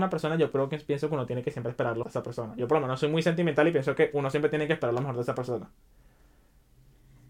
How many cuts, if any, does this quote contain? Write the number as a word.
one